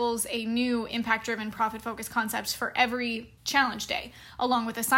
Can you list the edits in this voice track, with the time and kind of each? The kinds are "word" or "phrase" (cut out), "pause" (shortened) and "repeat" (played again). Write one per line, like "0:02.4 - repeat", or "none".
0:03.4 - pause